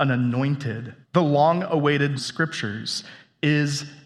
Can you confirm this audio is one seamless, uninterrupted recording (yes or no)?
no